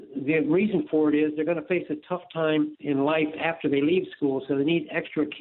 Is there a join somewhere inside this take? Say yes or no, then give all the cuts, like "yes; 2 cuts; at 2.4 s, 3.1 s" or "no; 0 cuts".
yes; 1 cut; at 2.7 s